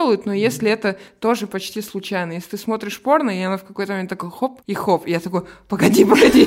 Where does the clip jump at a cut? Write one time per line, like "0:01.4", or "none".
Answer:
0:04.6